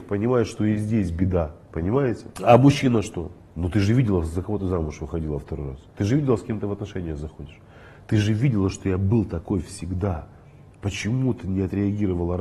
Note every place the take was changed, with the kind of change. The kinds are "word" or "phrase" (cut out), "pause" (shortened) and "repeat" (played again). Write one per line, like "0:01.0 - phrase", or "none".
none